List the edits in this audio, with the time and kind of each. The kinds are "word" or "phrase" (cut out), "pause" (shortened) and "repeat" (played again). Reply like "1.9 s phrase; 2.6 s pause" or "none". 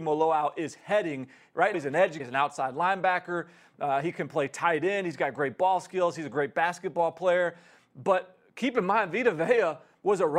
1.7 s word; 2.2 s word